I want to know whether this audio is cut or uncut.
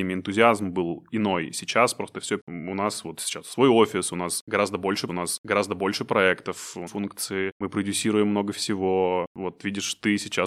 cut